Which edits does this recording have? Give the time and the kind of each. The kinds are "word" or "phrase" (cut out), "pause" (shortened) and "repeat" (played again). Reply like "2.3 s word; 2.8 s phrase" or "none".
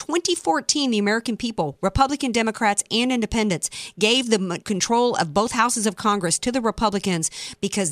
4.6 s word